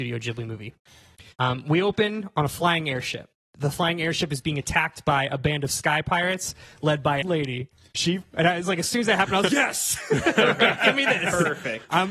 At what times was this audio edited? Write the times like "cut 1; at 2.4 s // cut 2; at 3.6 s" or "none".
cut 1; at 1.3 s // cut 2; at 7.2 s // cut 3; at 9.5 s